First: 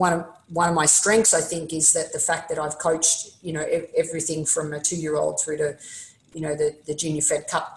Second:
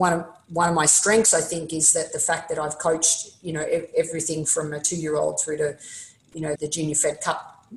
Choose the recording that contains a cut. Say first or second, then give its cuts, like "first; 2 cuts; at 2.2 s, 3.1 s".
second; 1 cut; at 6.6 s